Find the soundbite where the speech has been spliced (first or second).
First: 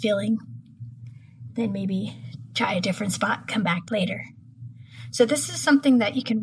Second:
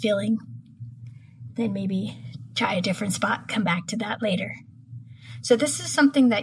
first